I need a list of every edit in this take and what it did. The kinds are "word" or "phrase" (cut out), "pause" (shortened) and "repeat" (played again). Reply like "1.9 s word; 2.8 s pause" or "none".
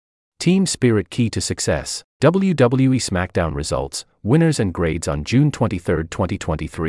2.1 s pause